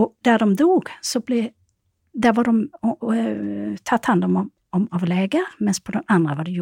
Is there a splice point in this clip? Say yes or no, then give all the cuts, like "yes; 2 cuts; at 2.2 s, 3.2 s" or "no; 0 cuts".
no; 0 cuts